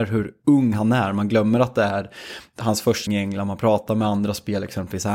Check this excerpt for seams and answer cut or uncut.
cut